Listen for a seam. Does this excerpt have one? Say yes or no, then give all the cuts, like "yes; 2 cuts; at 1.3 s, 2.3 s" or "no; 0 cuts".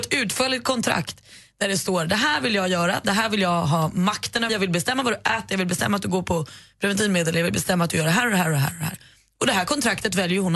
yes; 1 cut; at 4.5 s